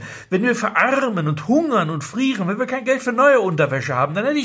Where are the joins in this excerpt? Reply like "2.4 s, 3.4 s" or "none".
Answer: none